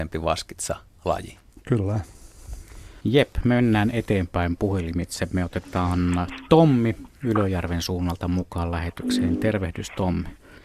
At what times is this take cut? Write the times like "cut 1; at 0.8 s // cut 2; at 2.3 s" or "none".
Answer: cut 1; at 3.0 s